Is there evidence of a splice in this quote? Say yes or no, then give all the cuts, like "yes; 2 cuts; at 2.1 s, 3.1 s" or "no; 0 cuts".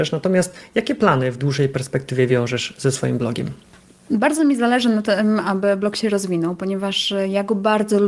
no; 0 cuts